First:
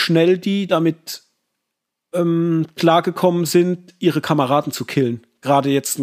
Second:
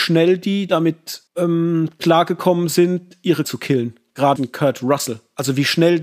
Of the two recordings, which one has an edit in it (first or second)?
second